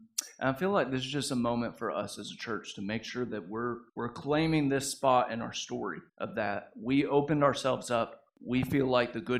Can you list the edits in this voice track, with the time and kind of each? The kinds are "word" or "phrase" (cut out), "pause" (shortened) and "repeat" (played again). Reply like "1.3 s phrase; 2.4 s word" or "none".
3.9 s pause; 6.1 s pause; 8.3 s pause